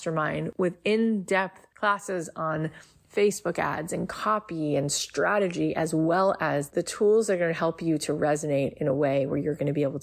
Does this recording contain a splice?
no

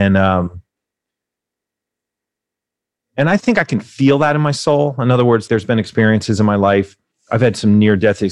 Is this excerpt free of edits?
no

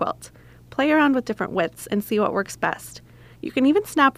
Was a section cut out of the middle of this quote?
no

